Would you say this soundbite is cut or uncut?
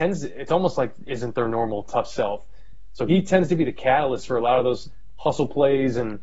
cut